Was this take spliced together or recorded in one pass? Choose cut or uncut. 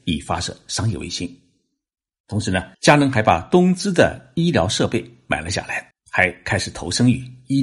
cut